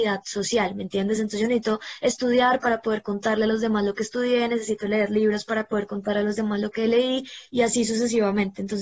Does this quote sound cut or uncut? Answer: uncut